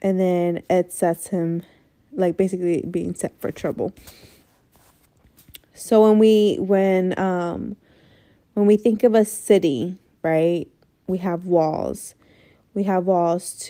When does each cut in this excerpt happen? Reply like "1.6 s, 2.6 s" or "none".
none